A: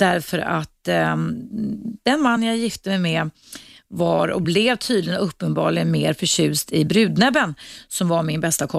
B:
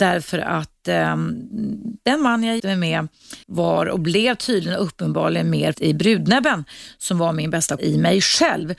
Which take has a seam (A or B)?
B